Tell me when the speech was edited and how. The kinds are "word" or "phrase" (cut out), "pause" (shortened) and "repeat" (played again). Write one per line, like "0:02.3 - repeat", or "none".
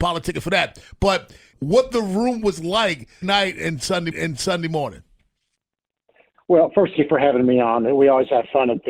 0:01.5 - phrase
0:03.2 - word
0:04.1 - repeat
0:07.0 - phrase